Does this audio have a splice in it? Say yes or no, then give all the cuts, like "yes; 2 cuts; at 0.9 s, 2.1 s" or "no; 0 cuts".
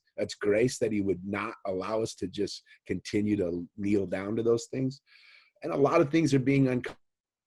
no; 0 cuts